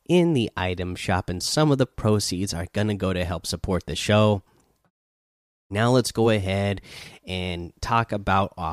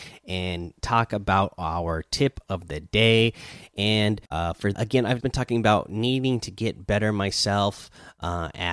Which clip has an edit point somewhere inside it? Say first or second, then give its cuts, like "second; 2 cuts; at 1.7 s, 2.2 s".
second; 3 cuts; at 4.3 s, 4.7 s, 5.2 s